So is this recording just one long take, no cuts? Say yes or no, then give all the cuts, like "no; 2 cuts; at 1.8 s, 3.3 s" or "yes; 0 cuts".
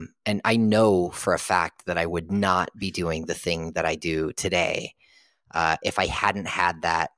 yes; 0 cuts